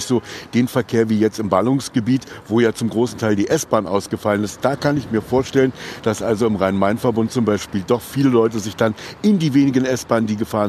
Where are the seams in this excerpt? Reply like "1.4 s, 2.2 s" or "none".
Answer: none